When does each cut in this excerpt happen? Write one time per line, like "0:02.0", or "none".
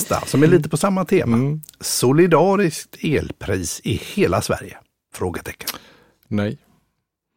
none